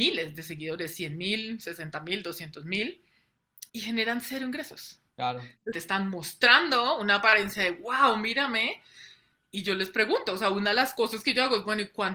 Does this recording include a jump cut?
yes; 3 cuts; at 3.7 s, 5.1 s, 5.7 s

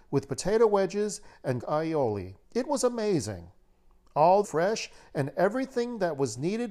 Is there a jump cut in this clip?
yes; 3 cuts; at 1.6 s, 2.4 s, 4.4 s

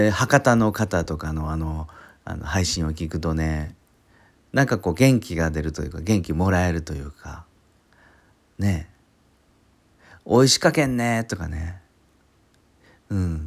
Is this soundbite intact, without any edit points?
yes; 0 cuts

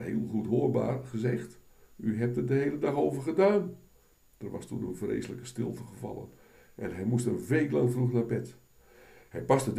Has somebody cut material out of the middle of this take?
no; 0 cuts

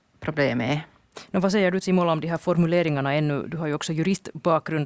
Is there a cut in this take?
yes; 1 cut; at 1.8 s

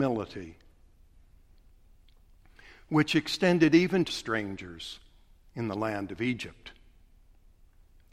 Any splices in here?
yes; 1 cut; at 4.1 s

